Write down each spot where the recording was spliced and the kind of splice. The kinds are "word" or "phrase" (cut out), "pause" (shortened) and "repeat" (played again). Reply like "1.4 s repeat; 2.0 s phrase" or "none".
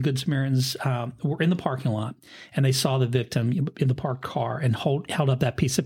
none

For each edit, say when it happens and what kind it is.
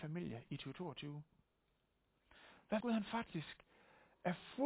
2.8 s word

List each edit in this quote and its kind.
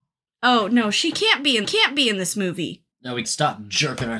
1.6 s repeat; 2.9 s pause; 3.2 s word

